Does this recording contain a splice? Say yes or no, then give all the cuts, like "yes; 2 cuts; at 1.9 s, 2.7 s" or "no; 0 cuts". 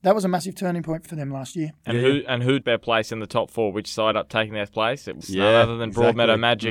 yes; 4 cuts; at 1.1 s, 2.6 s, 4.1 s, 5.2 s